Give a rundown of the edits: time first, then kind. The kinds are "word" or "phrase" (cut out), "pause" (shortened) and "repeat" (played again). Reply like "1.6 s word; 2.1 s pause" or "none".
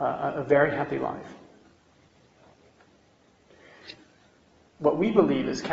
none